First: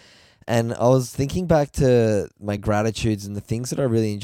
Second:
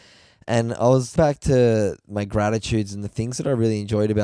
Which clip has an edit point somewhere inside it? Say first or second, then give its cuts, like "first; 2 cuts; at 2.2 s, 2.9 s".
second; 1 cut; at 1.2 s